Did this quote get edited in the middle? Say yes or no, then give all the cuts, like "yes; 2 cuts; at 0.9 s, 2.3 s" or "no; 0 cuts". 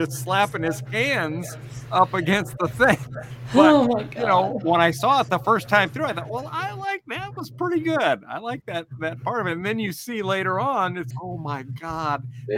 yes; 1 cut; at 11.1 s